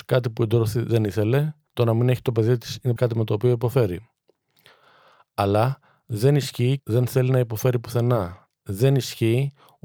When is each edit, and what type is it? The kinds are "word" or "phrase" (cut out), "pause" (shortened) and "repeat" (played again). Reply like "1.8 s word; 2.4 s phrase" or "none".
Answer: 1.7 s pause; 3.0 s word; 6.8 s phrase